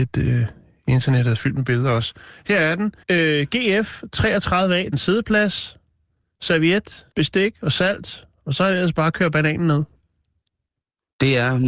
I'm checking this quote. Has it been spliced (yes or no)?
yes